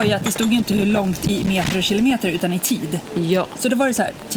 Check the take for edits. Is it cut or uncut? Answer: uncut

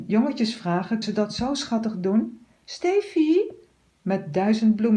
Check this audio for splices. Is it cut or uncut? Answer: cut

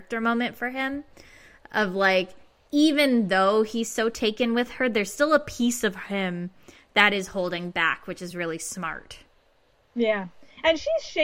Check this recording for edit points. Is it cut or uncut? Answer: uncut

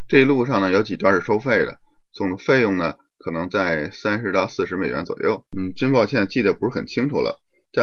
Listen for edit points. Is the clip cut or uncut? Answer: cut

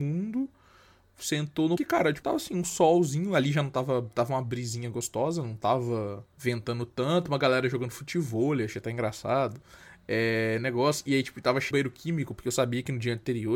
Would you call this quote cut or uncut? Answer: cut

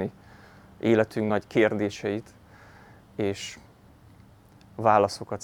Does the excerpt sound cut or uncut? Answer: uncut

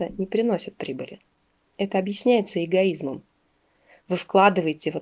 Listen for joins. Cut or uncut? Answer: uncut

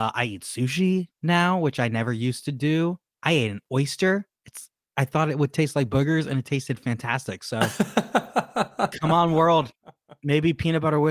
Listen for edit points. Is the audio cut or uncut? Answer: cut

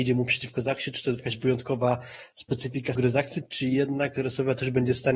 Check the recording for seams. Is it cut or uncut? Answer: cut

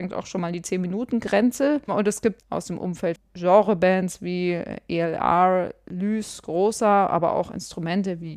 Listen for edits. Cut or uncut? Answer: cut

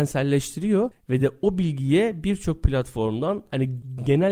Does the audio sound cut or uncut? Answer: uncut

